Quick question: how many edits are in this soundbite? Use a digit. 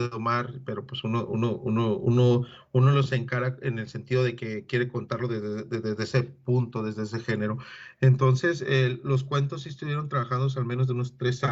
0